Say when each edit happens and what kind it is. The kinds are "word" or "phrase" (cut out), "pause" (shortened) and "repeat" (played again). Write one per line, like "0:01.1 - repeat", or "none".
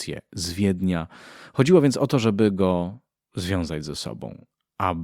none

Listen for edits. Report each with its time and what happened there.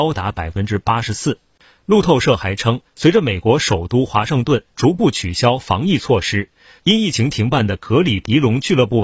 none

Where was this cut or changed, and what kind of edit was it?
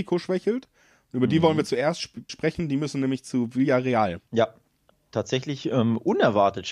0:02.3 - word
0:04.3 - pause

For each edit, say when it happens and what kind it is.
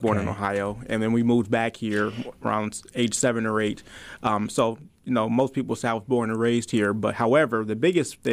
none

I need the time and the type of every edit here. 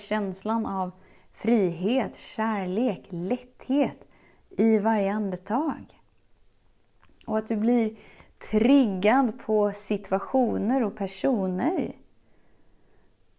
none

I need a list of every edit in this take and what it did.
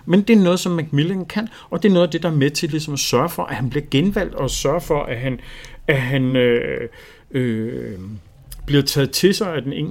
none

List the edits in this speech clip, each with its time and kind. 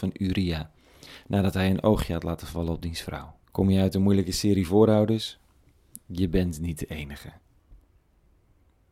0:03.4 - pause

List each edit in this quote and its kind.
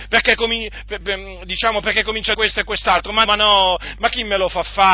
0:01.0 - word
0:02.3 - phrase
0:03.2 - word

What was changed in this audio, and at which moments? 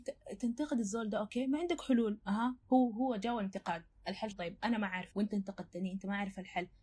0:02.6 - pause
0:04.3 - word
0:05.1 - word

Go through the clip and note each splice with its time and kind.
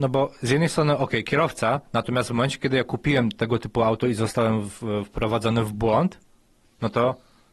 none

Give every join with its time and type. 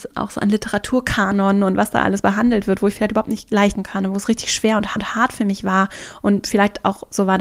0:03.7 - word
0:05.0 - repeat

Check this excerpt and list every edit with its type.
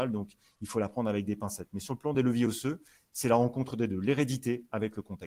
none

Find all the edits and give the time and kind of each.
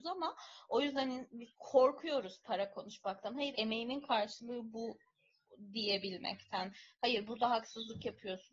0:01.5 - pause
0:03.5 - word

